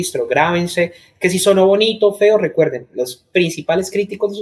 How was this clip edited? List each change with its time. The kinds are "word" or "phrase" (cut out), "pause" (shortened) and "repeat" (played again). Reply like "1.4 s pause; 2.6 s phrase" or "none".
none